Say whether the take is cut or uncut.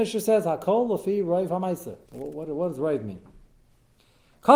cut